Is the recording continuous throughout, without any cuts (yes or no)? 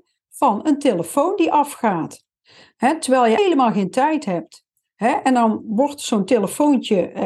no